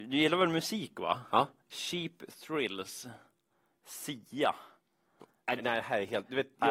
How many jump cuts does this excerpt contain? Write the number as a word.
one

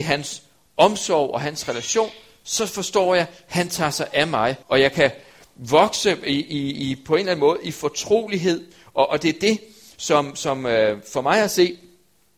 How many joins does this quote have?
one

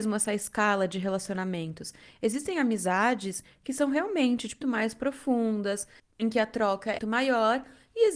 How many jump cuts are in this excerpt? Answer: two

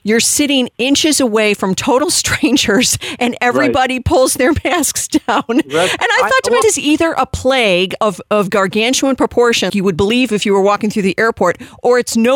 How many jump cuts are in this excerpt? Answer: two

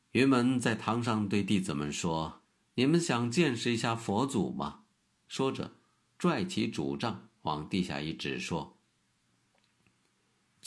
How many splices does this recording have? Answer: two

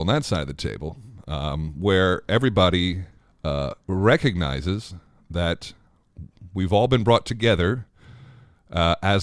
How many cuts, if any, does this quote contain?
one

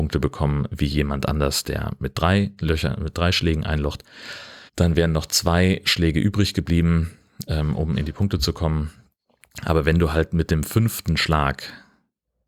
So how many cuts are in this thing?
one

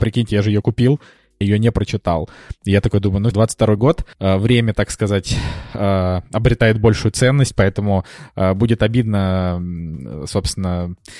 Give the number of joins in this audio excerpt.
three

